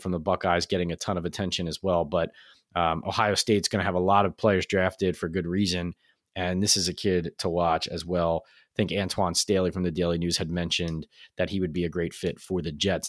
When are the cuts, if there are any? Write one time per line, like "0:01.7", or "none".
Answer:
none